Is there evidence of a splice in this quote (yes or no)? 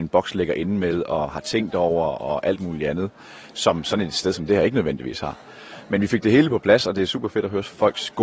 no